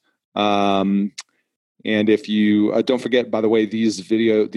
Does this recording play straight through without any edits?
yes; 0 cuts

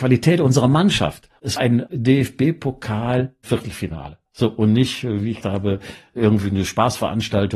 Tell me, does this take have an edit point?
yes; 2 cuts; at 1.6 s, 5.4 s

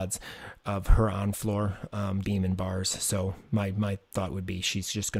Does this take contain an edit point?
yes; 1 cut; at 2.2 s

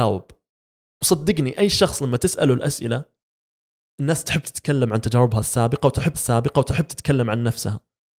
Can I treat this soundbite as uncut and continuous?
no; 1 cut; at 6.1 s

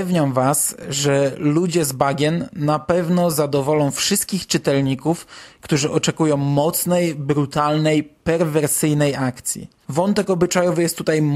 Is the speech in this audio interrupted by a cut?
yes; 1 cut; at 9.8 s

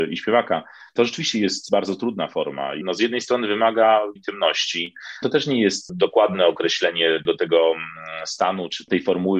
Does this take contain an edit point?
yes; 3 cuts; at 2.8 s, 4.2 s, 5.2 s

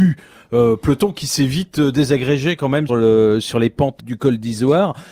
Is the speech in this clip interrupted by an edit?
yes; 2 cuts; at 2.9 s, 4.0 s

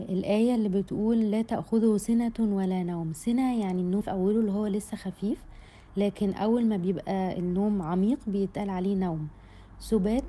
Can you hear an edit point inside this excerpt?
yes; 1 cut; at 4.0 s

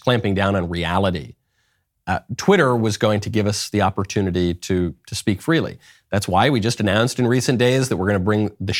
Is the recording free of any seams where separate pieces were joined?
yes; 0 cuts

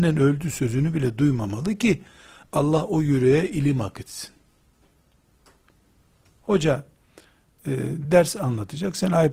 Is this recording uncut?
yes; 0 cuts

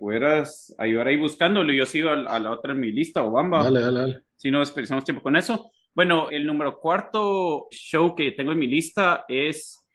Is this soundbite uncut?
no; 3 cuts; at 4.3 s, 6.3 s, 7.7 s

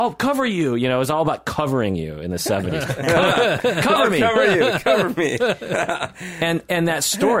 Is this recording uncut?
yes; 0 cuts

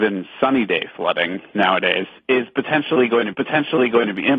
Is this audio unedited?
no; 1 cut; at 3.3 s

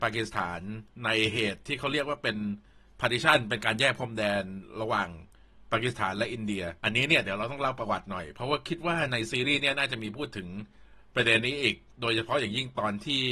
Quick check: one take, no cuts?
no; 1 cut; at 6.8 s

